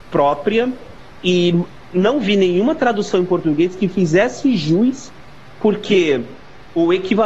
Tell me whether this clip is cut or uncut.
uncut